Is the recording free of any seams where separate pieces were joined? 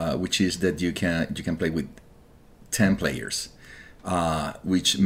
yes; 0 cuts

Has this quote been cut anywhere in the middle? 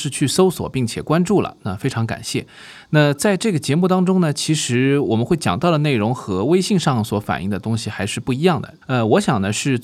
yes; 1 cut; at 8.8 s

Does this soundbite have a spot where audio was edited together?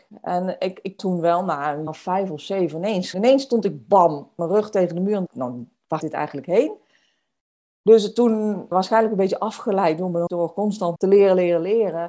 yes; 9 cuts; at 1.0 s, 1.9 s, 3.1 s, 4.4 s, 5.3 s, 6.0 s, 8.7 s, 10.3 s, 11.0 s

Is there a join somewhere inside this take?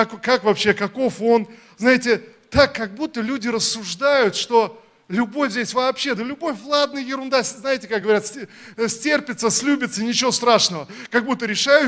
no; 0 cuts

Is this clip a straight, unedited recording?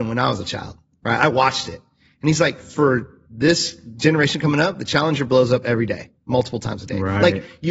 yes; 0 cuts

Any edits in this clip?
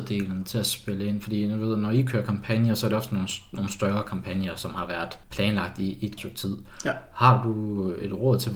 yes; 2 cuts; at 5.2 s, 6.2 s

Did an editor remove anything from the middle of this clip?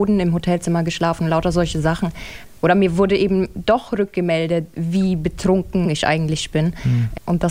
no; 0 cuts

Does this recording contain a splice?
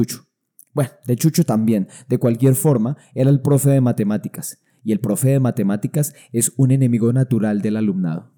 no; 0 cuts

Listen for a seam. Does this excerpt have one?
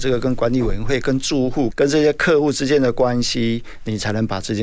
yes; 1 cut; at 1.7 s

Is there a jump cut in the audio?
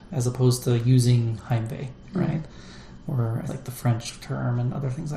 yes; 1 cut; at 3.5 s

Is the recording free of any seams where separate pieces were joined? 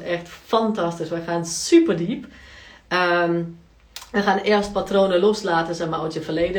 yes; 0 cuts

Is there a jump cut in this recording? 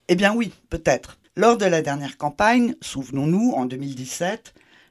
yes; 1 cut; at 1.3 s

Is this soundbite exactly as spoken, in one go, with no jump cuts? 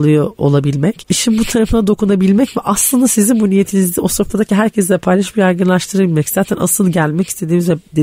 yes; 0 cuts

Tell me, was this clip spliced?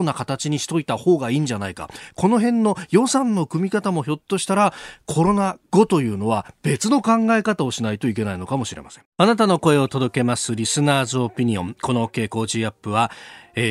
yes; 1 cut; at 9.1 s

